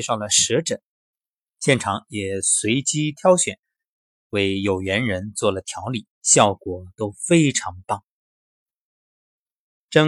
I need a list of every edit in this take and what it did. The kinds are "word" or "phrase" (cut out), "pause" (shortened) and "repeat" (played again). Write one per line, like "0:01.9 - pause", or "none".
0:06.1 - pause